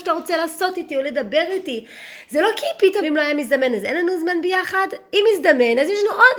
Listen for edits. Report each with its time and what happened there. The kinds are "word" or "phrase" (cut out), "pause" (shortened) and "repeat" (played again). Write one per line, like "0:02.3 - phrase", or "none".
0:03.0 - word